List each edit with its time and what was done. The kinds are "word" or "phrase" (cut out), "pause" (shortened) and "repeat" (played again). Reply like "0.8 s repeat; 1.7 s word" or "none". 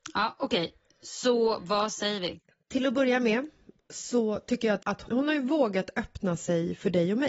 4.8 s phrase

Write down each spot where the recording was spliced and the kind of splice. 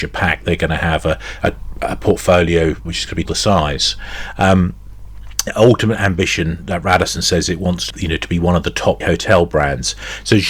1.4 s word; 2.9 s word; 3.3 s word; 5.5 s word; 7.9 s word; 9.0 s word

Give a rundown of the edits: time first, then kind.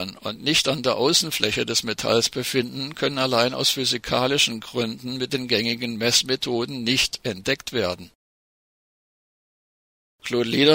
none

